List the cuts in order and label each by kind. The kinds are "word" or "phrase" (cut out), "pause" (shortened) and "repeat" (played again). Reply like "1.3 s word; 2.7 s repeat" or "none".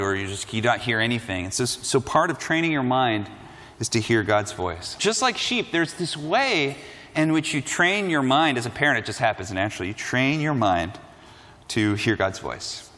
none